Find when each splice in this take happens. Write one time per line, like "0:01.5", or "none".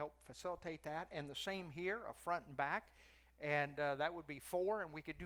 none